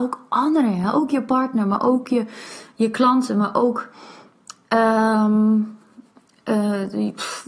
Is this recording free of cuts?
yes; 0 cuts

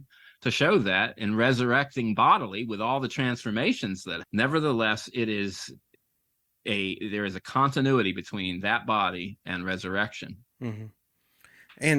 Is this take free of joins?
no; 2 cuts; at 4.2 s, 9.4 s

